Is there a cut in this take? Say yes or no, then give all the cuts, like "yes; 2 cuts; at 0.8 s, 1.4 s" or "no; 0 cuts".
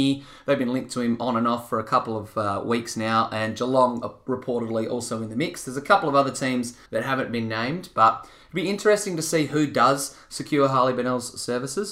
yes; 1 cut; at 6.9 s